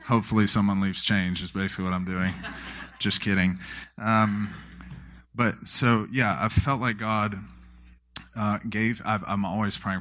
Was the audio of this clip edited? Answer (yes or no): no